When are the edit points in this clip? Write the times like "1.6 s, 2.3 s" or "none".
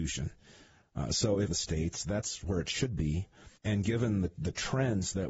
1.5 s, 3.6 s